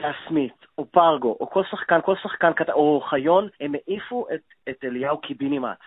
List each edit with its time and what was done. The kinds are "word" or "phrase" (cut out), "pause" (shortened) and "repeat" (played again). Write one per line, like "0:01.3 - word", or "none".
0:02.0 - repeat
0:03.5 - pause